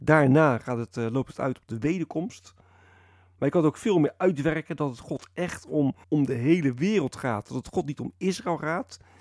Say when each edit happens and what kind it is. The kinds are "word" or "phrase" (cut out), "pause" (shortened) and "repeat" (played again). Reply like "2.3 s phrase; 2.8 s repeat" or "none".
6.0 s pause